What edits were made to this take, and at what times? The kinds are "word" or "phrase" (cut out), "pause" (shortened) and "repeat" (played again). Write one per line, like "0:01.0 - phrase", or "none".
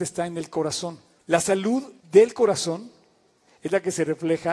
0:01.2 - pause
0:02.0 - pause